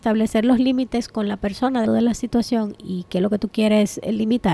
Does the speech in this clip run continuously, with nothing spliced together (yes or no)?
no